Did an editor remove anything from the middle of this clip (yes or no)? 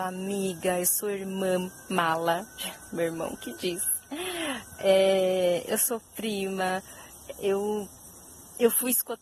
no